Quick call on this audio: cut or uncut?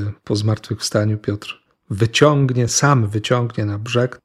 uncut